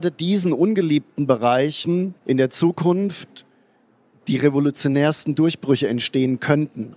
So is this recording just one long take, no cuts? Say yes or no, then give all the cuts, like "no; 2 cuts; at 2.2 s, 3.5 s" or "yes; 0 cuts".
no; 2 cuts; at 2.2 s, 3.8 s